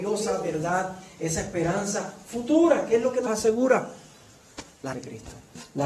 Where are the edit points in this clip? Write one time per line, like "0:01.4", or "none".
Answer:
0:03.3
0:04.9